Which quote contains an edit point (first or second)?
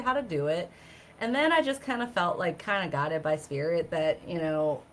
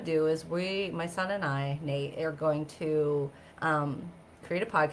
second